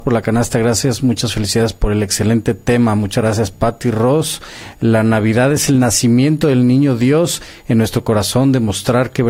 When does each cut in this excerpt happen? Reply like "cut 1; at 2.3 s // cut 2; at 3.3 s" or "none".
none